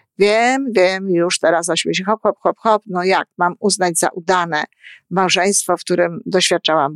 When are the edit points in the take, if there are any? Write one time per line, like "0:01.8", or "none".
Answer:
0:02.4